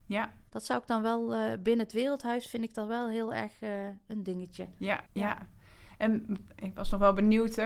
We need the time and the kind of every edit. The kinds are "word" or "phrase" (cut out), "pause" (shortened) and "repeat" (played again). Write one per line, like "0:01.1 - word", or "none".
0:05.1 - pause